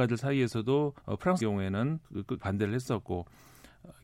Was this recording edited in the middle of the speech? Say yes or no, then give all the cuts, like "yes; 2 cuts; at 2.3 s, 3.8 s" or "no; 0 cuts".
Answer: yes; 4 cuts; at 1.0 s, 1.4 s, 2.0 s, 2.4 s